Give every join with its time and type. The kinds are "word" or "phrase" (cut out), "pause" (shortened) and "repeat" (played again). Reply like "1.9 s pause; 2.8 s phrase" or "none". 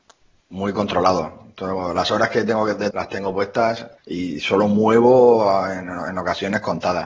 2.9 s word; 4.0 s pause